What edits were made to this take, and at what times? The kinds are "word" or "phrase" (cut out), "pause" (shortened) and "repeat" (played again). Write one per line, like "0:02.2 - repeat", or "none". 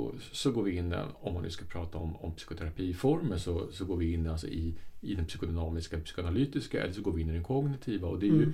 none